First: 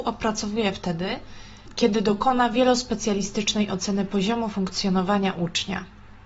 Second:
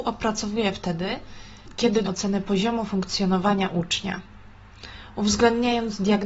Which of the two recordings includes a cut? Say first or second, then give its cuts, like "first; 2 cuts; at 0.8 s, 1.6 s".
second; 1 cut; at 2.0 s